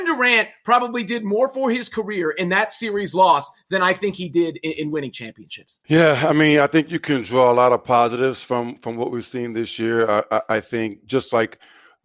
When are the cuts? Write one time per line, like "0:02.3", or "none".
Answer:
none